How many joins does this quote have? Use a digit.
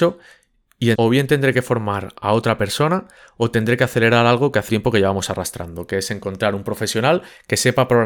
2